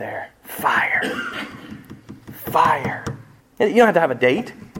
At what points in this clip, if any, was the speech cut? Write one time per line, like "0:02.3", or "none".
0:03.4